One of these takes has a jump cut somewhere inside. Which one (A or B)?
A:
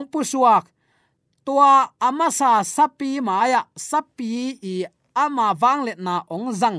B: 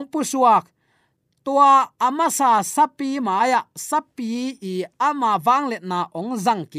B